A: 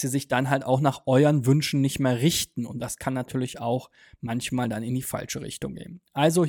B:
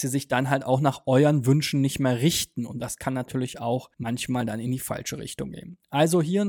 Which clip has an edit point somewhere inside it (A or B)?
B